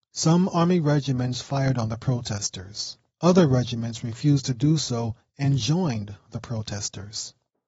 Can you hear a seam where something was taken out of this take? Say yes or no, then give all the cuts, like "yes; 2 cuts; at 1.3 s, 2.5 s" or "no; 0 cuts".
yes; 1 cut; at 3.1 s